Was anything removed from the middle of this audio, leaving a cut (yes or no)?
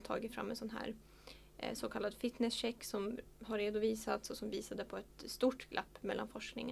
no